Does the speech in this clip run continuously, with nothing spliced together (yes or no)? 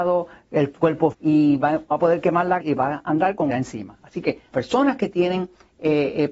no